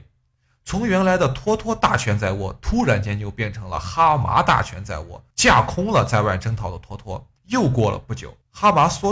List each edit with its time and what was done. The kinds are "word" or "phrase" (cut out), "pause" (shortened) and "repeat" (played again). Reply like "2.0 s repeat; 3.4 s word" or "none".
5.3 s pause; 7.4 s pause